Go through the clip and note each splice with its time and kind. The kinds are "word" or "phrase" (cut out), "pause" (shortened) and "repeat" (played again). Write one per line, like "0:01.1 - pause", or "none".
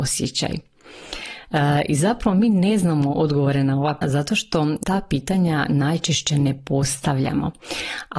0:04.0 - word
0:04.8 - word